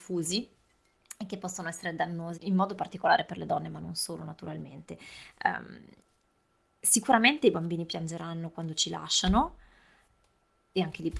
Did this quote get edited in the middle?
yes; 1 cut; at 2.3 s

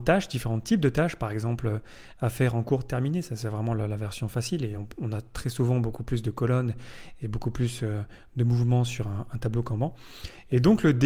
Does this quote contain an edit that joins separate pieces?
no; 0 cuts

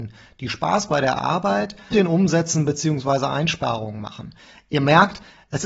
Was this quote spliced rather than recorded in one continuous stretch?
yes; 1 cut; at 1.9 s

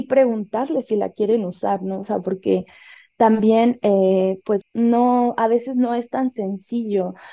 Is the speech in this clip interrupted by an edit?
yes; 1 cut; at 4.6 s

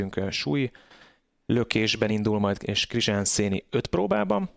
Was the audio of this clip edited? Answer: no; 0 cuts

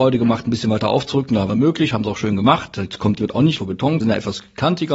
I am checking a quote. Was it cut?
yes; 4 cuts; at 1.5 s, 3.2 s, 3.6 s, 4.0 s

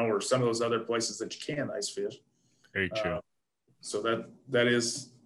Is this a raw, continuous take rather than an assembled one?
yes; 0 cuts

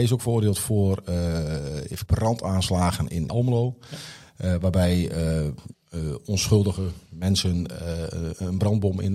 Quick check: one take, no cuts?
no; 3 cuts; at 2.1 s, 3.3 s, 5.7 s

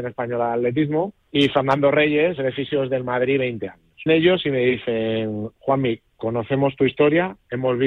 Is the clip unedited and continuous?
no; 3 cuts; at 1.2 s, 2.4 s, 4.1 s

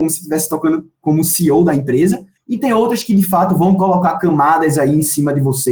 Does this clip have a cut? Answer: no; 0 cuts

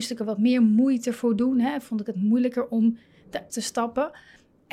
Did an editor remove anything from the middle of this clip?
yes; 1 cut; at 3.5 s

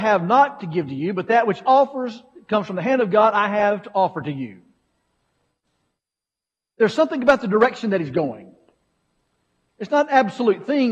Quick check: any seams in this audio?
no; 0 cuts

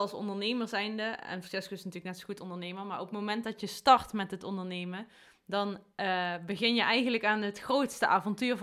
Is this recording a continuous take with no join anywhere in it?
yes; 0 cuts

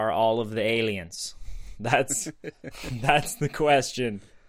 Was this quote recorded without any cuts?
yes; 0 cuts

